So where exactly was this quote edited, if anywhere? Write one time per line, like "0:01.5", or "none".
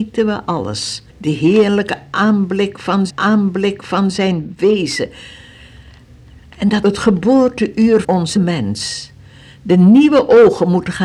0:01.1
0:03.1
0:06.8
0:08.0
0:08.4